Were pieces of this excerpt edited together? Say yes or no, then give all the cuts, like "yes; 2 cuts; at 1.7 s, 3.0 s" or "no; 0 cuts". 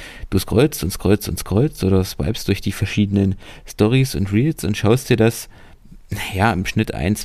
no; 0 cuts